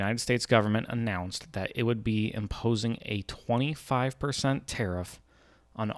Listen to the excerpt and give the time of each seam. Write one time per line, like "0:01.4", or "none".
none